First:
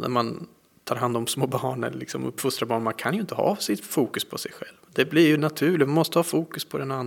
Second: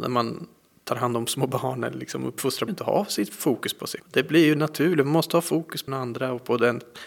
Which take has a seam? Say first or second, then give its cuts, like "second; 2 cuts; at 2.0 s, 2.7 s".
second; 3 cuts; at 2.7 s, 4.0 s, 5.9 s